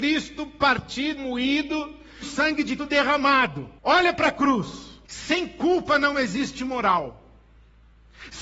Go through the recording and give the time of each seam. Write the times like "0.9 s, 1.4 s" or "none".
1.2 s, 2.2 s, 2.8 s, 3.8 s, 5.0 s